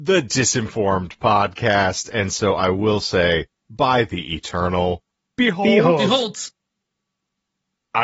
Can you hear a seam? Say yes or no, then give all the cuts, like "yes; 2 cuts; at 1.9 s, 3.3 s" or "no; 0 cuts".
no; 0 cuts